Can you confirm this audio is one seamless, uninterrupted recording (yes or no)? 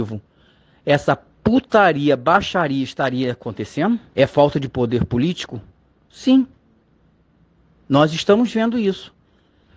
no